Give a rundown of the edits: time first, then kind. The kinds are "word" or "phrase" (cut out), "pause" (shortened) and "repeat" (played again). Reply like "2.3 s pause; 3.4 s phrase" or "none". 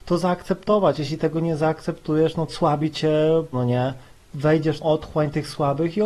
2.5 s phrase; 3.5 s word; 4.1 s pause; 4.8 s word